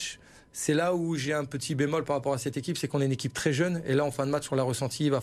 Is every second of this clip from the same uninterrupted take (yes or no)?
yes